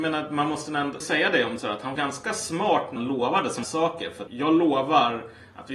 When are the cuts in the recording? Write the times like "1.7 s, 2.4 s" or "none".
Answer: 1.0 s, 1.6 s, 2.0 s, 3.0 s, 3.6 s, 4.3 s